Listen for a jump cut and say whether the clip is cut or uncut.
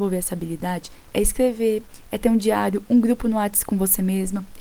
uncut